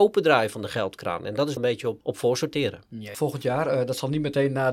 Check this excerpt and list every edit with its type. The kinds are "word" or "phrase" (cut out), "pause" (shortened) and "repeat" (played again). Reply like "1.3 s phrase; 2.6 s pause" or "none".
1.6 s phrase; 2.0 s word; 3.1 s word